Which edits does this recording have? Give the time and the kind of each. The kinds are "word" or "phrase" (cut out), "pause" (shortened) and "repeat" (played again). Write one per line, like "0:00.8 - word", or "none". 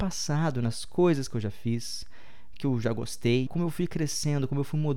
0:03.5 - phrase